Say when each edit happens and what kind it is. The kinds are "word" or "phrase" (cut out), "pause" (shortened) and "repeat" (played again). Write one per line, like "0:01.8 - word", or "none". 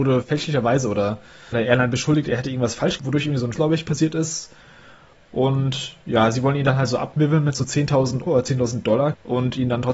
0:01.5 - word
0:03.0 - word
0:03.5 - word
0:08.3 - word